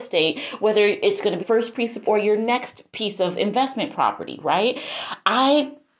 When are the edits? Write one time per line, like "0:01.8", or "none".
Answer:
0:01.4
0:02.1
0:02.9